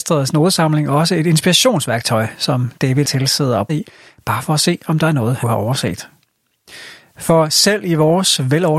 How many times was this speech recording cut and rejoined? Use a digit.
3